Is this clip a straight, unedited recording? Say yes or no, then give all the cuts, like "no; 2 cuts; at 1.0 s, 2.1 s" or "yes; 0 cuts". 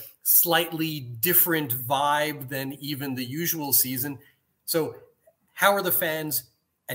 yes; 0 cuts